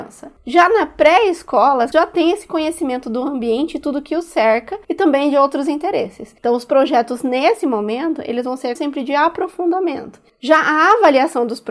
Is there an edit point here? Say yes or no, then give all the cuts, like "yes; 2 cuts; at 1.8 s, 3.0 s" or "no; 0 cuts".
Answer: yes; 3 cuts; at 1.9 s, 4.8 s, 8.8 s